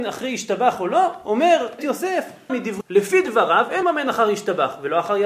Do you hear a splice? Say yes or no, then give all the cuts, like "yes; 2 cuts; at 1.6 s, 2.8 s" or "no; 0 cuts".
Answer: yes; 4 cuts; at 1.8 s, 2.5 s, 2.8 s, 3.8 s